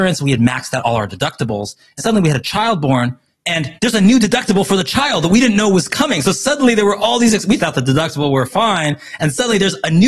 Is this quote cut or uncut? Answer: cut